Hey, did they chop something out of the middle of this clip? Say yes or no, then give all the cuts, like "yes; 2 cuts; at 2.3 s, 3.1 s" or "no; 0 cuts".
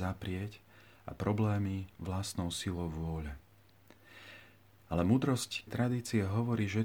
yes; 2 cuts; at 1.9 s, 5.7 s